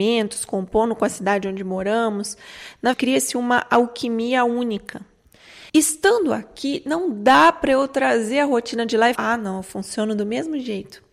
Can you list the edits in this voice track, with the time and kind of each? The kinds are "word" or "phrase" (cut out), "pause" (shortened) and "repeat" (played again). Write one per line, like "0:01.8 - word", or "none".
0:02.9 - word
0:05.7 - pause
0:09.2 - word